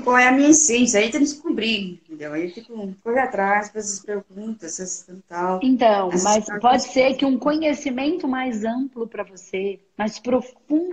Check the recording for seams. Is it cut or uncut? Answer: uncut